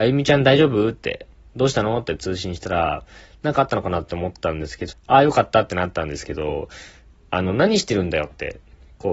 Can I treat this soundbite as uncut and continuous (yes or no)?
no